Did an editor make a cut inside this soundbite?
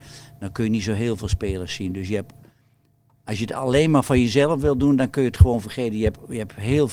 no; 0 cuts

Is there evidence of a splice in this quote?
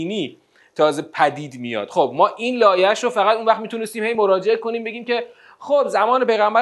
no; 0 cuts

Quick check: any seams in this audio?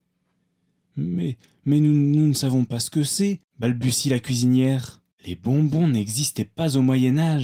yes; 1 cut; at 5.1 s

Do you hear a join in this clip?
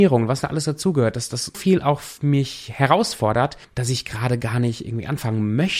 yes; 2 cuts; at 1.5 s, 3.6 s

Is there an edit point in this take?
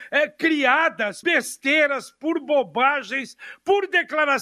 yes; 1 cut; at 1.2 s

